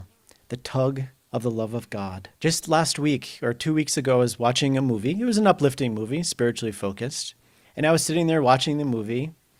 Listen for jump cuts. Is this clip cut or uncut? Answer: cut